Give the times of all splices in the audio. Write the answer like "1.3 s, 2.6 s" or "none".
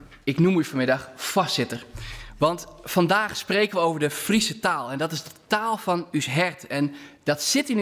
none

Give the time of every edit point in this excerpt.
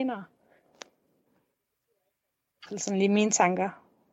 2.7 s

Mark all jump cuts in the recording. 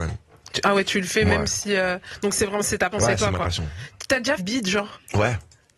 2.9 s, 4.4 s

